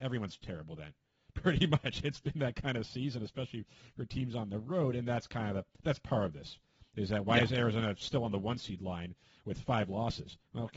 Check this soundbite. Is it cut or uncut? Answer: uncut